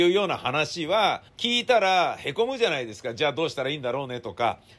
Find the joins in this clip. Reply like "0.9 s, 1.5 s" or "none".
1.3 s